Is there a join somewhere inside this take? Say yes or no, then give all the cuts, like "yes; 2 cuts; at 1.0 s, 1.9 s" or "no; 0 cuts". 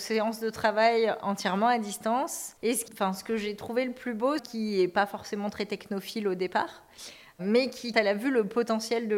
yes; 3 cuts; at 2.9 s, 4.4 s, 7.9 s